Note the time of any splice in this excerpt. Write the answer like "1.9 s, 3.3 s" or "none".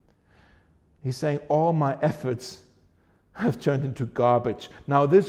none